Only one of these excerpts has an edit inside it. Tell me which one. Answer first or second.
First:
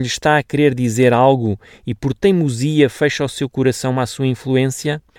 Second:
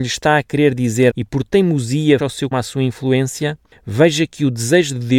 second